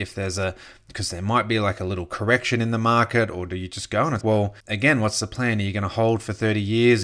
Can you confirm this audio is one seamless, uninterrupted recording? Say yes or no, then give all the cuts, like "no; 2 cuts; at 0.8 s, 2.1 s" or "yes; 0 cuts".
no; 2 cuts; at 4.2 s, 4.6 s